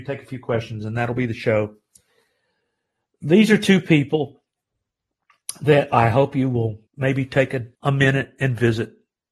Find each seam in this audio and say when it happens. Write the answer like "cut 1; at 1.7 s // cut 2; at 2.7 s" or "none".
cut 1; at 6.9 s // cut 2; at 7.7 s